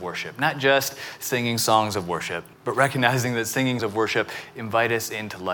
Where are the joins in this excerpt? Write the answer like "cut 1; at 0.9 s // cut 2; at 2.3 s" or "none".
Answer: cut 1; at 2.5 s // cut 2; at 3.8 s